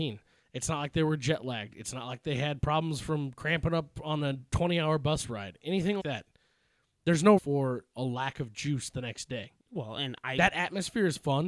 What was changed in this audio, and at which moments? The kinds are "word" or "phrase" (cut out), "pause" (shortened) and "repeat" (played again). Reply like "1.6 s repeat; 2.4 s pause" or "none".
6.0 s word; 7.4 s word; 9.6 s pause